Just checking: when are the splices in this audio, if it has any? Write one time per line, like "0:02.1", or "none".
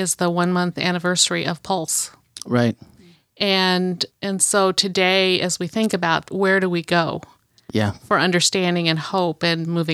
0:04.1
0:06.3

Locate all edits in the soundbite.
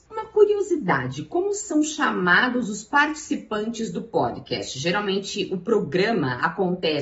none

